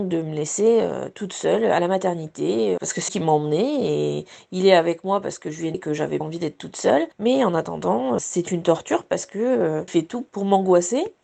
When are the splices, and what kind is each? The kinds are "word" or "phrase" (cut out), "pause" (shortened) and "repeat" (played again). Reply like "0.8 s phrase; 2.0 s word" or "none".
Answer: 2.8 s word; 3.1 s word; 5.7 s word; 6.2 s word; 8.2 s word; 9.9 s word